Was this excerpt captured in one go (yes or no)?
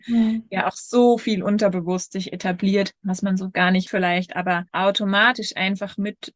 no